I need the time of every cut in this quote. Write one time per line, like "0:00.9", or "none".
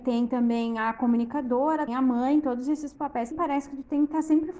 0:01.9
0:03.3